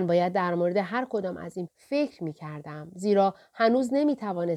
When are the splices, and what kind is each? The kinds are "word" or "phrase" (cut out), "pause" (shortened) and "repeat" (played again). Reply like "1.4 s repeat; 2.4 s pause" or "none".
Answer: 1.7 s word